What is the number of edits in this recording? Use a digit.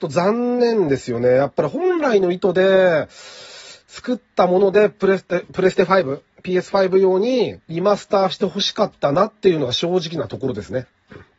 1